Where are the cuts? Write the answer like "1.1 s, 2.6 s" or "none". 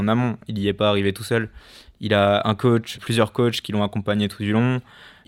2.9 s